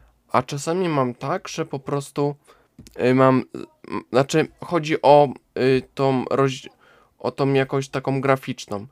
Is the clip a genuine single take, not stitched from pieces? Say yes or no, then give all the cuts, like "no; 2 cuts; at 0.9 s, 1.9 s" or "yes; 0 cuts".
yes; 0 cuts